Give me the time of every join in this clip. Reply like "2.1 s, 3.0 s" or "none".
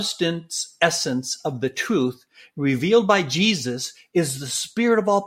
none